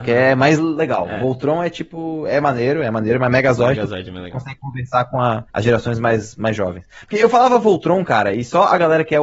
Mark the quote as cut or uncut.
cut